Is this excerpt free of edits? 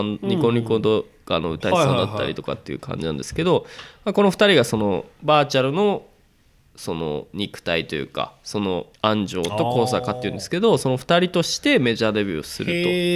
no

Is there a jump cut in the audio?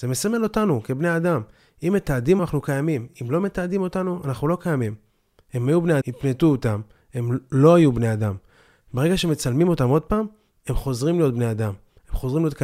yes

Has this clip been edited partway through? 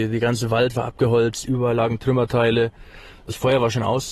no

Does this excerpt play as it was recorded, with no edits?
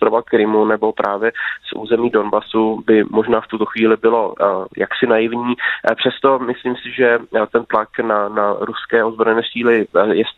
yes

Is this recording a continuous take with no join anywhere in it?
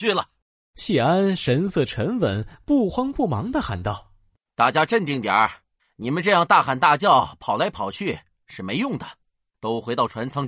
yes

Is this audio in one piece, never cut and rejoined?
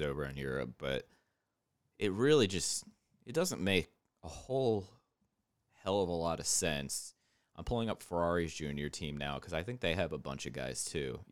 yes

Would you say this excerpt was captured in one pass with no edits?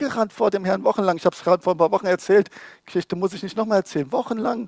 yes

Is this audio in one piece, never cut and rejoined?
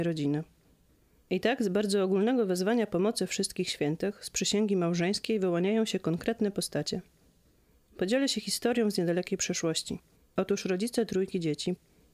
no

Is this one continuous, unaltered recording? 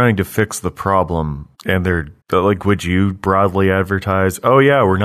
no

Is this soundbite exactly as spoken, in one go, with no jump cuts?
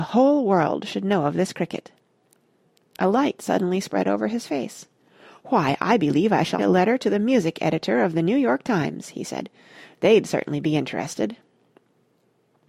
no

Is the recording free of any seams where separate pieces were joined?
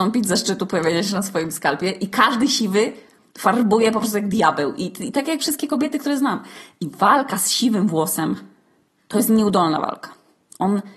yes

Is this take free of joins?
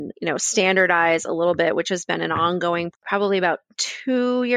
no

